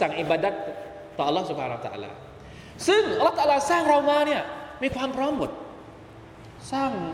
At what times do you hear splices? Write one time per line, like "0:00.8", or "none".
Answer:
none

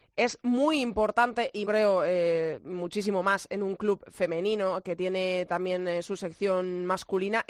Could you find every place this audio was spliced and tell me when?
0:01.6

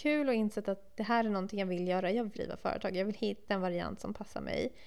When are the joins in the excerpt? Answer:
0:02.3
0:03.5

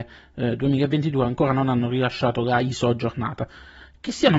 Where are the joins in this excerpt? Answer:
none

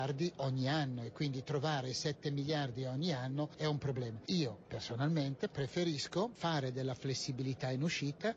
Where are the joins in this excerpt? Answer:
none

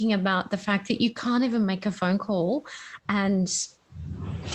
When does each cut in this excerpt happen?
none

